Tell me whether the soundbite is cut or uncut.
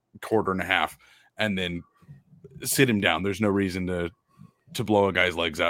uncut